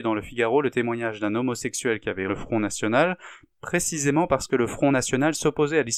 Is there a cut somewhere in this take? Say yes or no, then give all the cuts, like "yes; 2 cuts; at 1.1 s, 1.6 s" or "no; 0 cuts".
yes; 1 cut; at 2.3 s